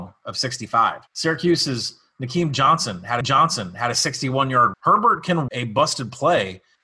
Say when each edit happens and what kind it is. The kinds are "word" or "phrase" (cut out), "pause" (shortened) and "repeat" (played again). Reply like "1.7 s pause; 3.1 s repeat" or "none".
1.1 s pause; 3.2 s repeat; 4.7 s word; 5.5 s word